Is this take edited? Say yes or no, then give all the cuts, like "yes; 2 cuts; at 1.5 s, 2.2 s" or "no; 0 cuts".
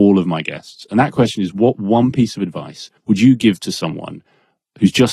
yes; 1 cut; at 3.0 s